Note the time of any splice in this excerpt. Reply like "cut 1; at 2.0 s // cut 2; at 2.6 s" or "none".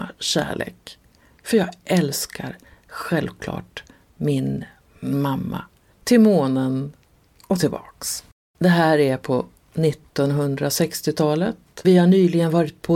cut 1; at 11.8 s